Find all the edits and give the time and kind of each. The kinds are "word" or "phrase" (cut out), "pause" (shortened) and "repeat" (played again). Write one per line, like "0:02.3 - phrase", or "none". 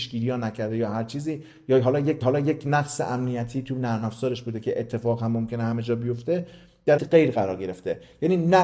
0:02.2 - repeat
0:07.0 - word